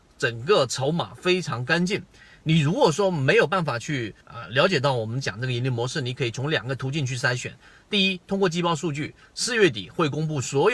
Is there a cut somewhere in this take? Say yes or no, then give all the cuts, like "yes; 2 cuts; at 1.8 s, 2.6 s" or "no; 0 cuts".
yes; 1 cut; at 4.2 s